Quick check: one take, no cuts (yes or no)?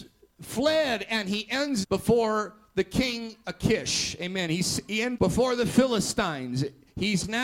no